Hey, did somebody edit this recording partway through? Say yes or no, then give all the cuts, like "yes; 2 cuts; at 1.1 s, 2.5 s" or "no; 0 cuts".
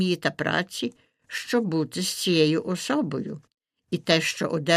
no; 0 cuts